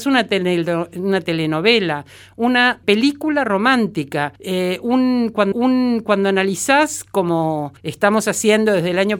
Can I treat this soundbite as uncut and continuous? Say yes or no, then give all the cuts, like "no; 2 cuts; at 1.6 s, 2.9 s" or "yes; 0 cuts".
no; 4 cuts; at 2.8 s, 4.4 s, 5.5 s, 7.8 s